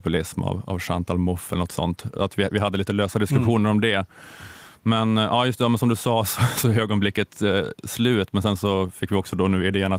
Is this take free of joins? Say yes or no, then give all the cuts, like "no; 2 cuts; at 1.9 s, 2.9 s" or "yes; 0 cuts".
yes; 0 cuts